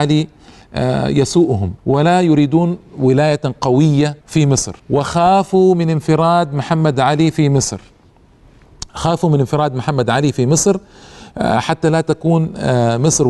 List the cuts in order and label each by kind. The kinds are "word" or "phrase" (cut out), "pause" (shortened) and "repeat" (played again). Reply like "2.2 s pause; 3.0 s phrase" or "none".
1.8 s pause; 4.2 s pause; 4.8 s pause